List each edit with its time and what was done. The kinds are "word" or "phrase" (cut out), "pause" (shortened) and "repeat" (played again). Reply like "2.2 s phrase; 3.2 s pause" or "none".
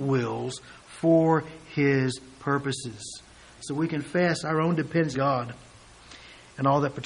5.1 s word